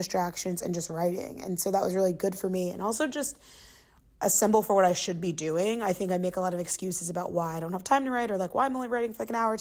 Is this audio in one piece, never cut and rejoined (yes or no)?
yes